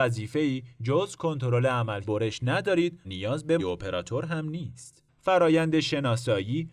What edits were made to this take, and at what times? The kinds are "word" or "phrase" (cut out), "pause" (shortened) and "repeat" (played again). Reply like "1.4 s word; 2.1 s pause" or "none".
2.0 s word; 3.0 s word; 3.6 s word

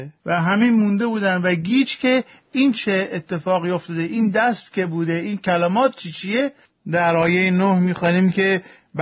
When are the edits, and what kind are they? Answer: none

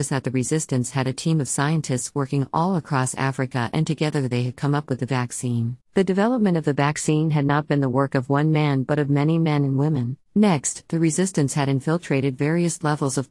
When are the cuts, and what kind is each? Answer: 5.8 s pause; 10.3 s pause

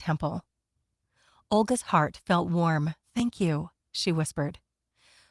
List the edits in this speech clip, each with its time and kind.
3.0 s pause

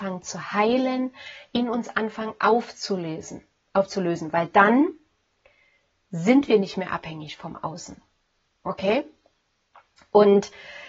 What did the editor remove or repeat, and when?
none

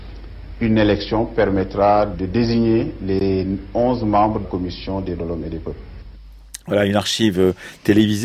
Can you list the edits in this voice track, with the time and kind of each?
4.4 s word; 5.2 s word

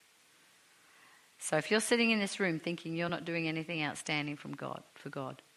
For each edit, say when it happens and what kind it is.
none

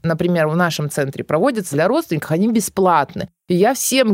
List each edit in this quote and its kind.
1.7 s word

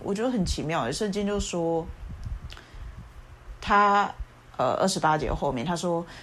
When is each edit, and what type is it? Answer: none

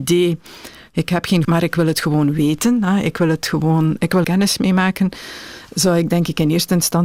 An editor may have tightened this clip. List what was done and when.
1.4 s phrase; 4.2 s word

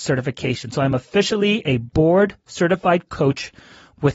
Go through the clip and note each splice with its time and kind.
none

